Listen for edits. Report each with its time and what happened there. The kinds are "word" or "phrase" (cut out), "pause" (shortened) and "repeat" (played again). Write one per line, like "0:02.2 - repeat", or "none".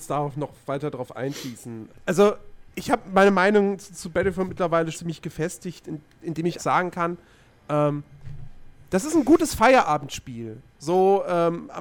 0:01.9 - word
0:02.7 - word
0:04.9 - word
0:06.6 - word